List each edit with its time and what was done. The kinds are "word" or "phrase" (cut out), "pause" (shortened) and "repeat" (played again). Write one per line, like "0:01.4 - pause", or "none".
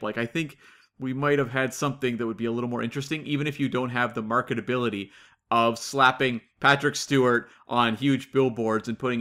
none